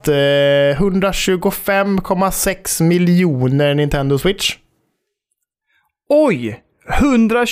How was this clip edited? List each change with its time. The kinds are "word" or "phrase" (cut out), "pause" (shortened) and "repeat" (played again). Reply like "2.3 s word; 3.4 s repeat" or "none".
none